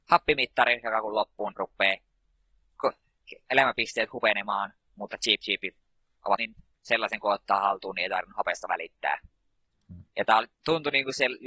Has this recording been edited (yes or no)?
yes